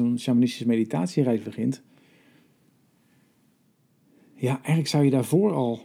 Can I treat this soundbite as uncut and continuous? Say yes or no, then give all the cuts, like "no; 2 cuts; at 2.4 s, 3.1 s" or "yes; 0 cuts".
yes; 0 cuts